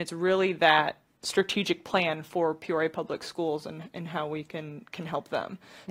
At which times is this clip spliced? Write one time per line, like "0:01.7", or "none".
none

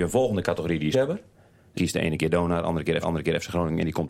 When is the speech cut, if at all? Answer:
0:00.9
0:01.8
0:03.0

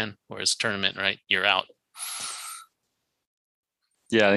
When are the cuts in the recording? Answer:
0:01.2

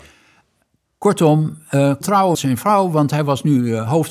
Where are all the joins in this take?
0:02.0
0:02.3

